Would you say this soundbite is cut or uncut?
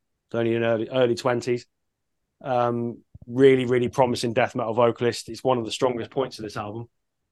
uncut